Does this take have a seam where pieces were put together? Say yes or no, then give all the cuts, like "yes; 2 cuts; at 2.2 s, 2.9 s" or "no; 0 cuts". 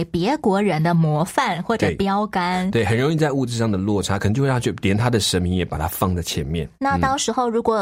yes; 1 cut; at 6.7 s